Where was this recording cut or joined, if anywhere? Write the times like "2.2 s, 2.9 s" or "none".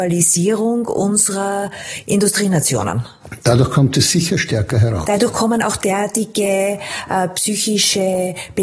none